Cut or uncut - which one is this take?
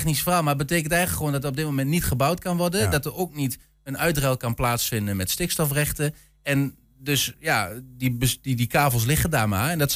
uncut